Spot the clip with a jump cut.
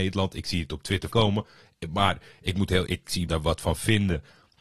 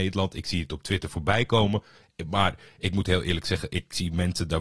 first; 3 cuts; at 1.1 s, 2.9 s, 3.3 s

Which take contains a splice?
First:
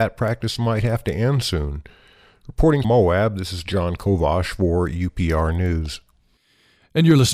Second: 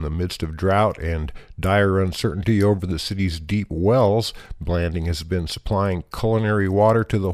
first; 1 cut; at 2.8 s

